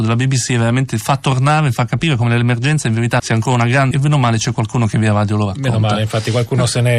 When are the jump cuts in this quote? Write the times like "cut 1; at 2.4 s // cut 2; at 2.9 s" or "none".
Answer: cut 1; at 3.2 s // cut 2; at 3.9 s

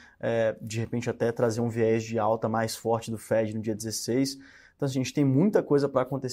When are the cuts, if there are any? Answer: none

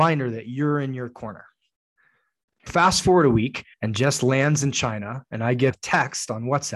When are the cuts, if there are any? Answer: cut 1; at 2.7 s // cut 2; at 3.7 s // cut 3; at 5.7 s

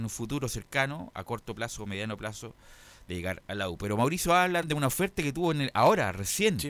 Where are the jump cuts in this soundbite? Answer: cut 1; at 4.6 s

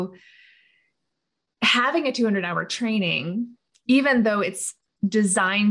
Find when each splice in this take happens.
none

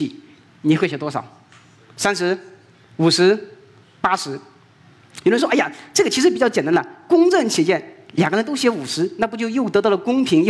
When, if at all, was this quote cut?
none

